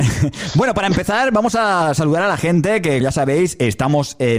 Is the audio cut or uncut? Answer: cut